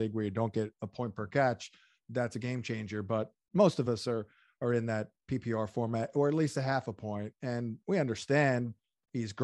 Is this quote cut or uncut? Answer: uncut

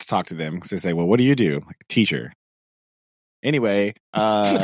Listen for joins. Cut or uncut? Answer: uncut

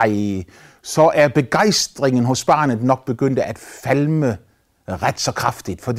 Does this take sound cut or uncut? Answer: uncut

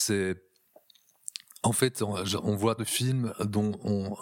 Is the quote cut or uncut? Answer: cut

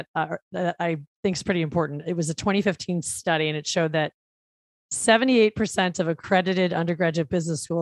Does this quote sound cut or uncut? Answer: uncut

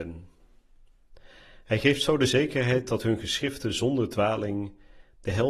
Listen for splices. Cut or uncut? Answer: uncut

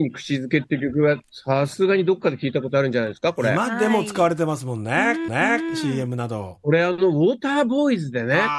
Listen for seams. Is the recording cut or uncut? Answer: cut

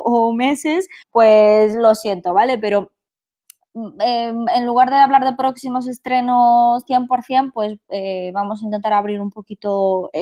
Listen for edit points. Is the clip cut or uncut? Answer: cut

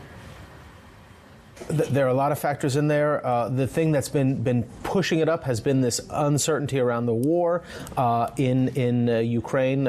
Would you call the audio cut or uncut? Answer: uncut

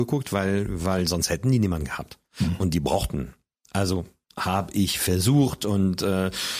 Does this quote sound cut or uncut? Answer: uncut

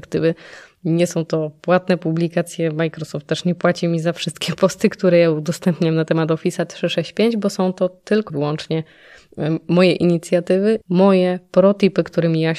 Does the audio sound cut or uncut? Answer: cut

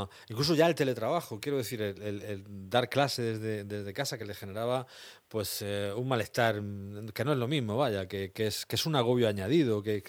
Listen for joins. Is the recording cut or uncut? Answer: uncut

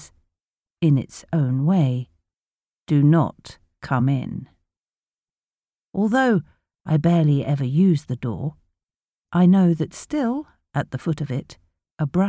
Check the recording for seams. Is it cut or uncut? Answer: uncut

